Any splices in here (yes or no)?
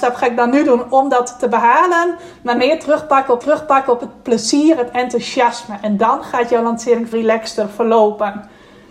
yes